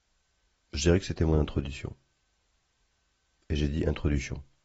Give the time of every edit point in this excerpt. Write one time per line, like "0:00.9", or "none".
none

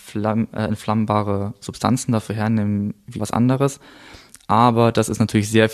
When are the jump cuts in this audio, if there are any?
0:03.2

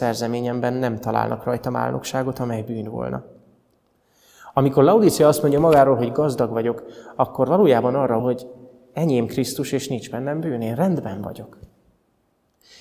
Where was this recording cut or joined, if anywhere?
0:08.2

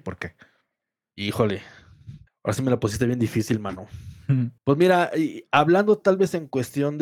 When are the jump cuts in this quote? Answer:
0:02.3
0:04.6

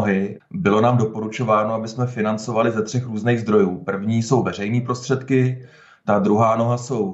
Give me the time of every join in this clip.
none

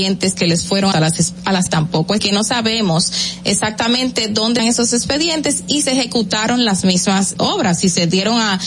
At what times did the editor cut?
0:00.9
0:01.7
0:02.2
0:04.6
0:05.8
0:07.3

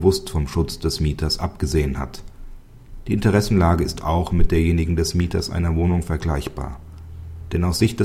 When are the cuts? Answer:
none

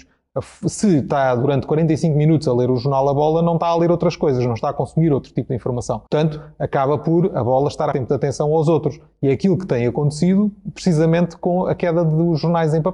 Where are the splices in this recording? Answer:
0:06.1
0:07.9

